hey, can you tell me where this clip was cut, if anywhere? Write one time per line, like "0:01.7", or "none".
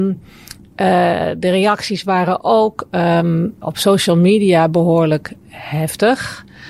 0:03.6